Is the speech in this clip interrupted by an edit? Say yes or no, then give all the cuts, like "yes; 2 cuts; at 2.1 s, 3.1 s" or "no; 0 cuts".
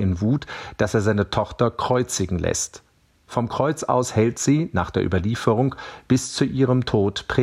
no; 0 cuts